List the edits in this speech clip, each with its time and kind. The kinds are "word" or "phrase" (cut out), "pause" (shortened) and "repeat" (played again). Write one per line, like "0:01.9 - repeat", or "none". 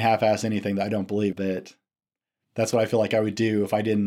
0:01.3 - word

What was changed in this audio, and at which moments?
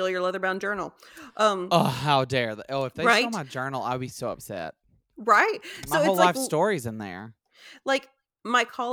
none

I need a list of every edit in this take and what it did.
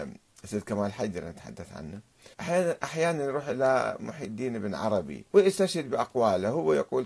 0:02.3 - pause
0:05.3 - pause

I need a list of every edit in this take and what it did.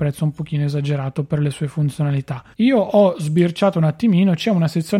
0:02.5 - pause

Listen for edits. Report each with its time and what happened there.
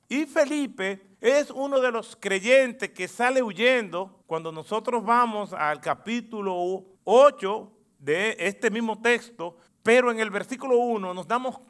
0:01.1 - pause
0:04.2 - pause
0:06.9 - pause
0:09.7 - pause

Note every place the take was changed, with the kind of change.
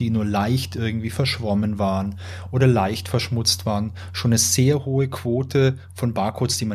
none

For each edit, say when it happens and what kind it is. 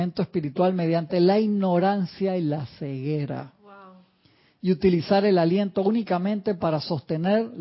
none

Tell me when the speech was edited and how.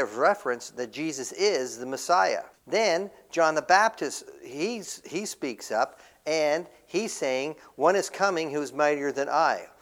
0:02.5 - pause

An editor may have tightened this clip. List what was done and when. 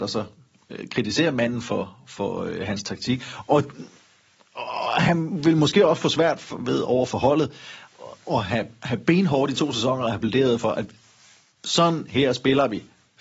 none

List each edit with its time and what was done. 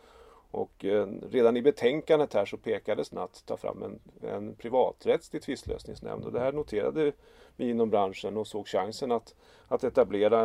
0:03.1 - phrase

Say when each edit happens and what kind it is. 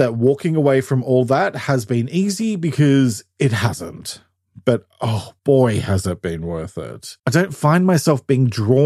0:05.4 - pause
0:07.2 - pause

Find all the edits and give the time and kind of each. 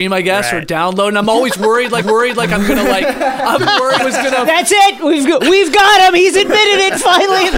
0:02.0 - repeat
0:03.6 - word
0:04.0 - word

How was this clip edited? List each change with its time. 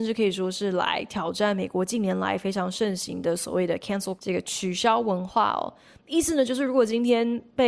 0:04.2 - word

